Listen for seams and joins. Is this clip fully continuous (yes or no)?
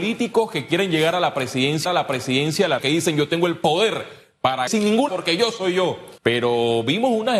no